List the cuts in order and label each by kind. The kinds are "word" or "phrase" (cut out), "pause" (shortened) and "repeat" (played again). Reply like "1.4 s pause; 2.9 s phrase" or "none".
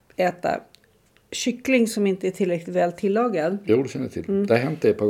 none